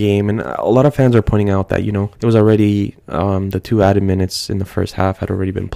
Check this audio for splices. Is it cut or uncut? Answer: cut